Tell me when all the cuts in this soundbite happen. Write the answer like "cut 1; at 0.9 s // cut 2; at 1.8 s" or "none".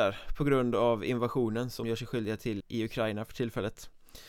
cut 1; at 1.8 s // cut 2; at 2.6 s